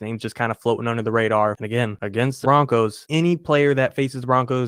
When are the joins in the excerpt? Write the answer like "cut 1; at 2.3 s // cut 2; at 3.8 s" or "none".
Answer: cut 1; at 2.4 s